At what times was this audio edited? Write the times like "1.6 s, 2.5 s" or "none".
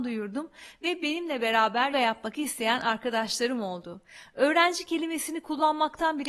1.9 s